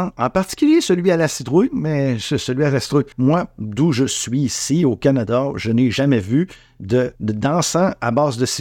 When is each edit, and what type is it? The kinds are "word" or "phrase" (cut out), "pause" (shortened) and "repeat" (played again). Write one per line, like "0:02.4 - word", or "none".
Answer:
0:03.1 - pause
0:07.2 - pause